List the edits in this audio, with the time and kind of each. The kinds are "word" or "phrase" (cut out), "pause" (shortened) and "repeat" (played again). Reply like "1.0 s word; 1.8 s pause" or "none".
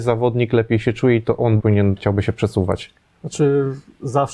1.6 s word; 2.0 s phrase

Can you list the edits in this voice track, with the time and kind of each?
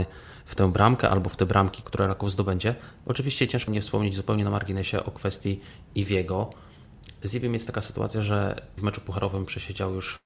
1.8 s word; 3.7 s word; 8.8 s word

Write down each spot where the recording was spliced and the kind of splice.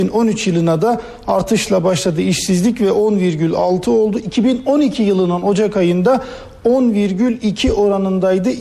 none

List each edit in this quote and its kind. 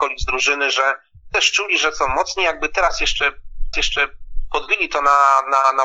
3.7 s repeat

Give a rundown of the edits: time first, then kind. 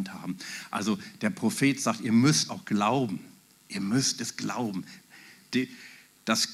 2.5 s word

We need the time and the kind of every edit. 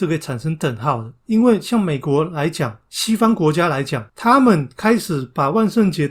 1.2 s pause

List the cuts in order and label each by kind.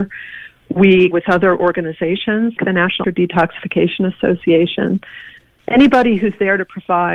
1.1 s word; 2.6 s word; 3.0 s word

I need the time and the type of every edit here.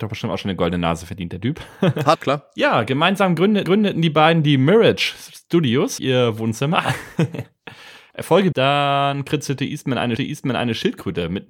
2.1 s word; 3.6 s repeat; 6.0 s word; 8.5 s phrase; 10.2 s repeat

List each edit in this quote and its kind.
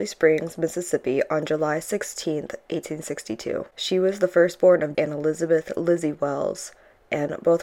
4.9 s word

